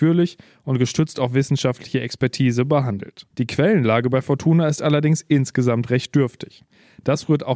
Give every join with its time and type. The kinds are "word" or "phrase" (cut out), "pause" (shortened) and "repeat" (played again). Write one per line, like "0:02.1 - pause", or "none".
0:03.3 - pause